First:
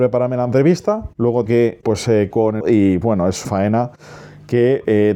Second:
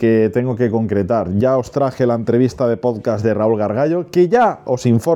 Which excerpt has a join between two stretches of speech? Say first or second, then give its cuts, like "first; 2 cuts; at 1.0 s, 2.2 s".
first; 6 cuts; at 1.5 s, 1.8 s, 2.3 s, 2.6 s, 3.0 s, 3.4 s